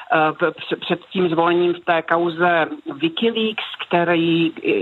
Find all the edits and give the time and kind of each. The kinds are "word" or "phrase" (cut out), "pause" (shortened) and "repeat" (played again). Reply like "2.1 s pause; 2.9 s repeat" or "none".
none